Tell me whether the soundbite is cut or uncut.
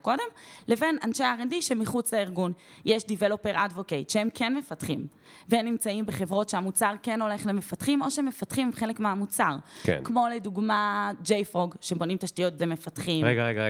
cut